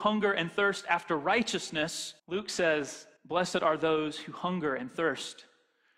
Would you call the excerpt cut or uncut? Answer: cut